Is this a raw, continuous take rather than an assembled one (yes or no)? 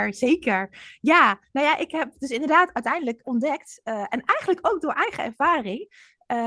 no